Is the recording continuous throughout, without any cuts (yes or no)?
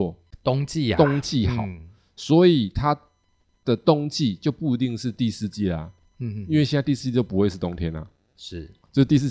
yes